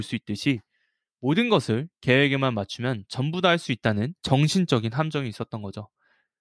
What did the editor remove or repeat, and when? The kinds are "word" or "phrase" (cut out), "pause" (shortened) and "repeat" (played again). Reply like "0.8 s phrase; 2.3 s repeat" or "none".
4.2 s pause